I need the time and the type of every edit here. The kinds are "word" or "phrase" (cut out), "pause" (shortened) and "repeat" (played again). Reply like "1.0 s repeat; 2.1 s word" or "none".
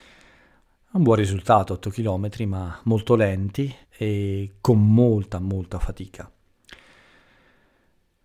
3.8 s pause